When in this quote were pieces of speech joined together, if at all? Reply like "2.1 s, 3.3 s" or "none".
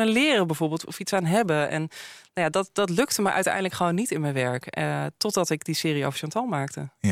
none